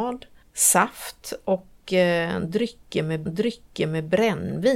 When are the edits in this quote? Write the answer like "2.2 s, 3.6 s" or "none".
3.3 s